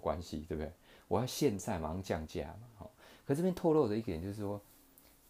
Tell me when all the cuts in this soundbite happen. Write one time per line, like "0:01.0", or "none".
none